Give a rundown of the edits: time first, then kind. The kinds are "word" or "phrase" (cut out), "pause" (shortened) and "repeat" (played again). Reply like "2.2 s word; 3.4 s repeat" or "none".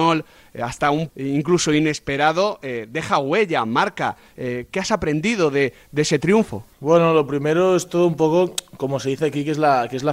1.1 s word; 6.7 s pause